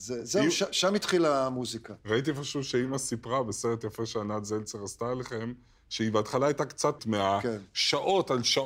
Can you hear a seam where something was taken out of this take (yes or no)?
yes